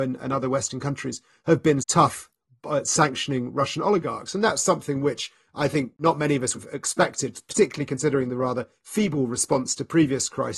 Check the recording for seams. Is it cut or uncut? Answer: cut